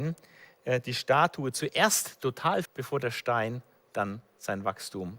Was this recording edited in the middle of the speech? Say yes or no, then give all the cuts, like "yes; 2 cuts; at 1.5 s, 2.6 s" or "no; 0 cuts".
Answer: yes; 1 cut; at 2.7 s